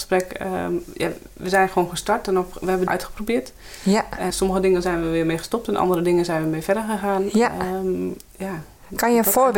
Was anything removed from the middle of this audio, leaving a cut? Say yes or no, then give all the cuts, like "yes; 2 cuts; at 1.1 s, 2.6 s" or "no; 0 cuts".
yes; 3 cuts; at 2.9 s, 4.3 s, 8.3 s